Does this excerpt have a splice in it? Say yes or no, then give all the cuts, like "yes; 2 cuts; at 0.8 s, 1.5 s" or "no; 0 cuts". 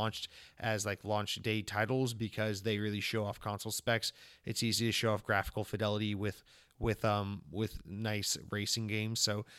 no; 0 cuts